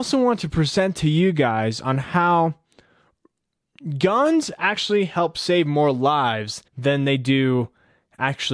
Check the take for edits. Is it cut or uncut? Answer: cut